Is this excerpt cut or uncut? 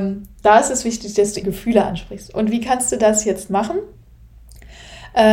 cut